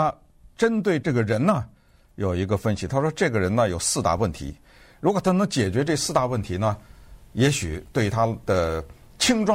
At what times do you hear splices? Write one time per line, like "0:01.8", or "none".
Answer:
0:01.0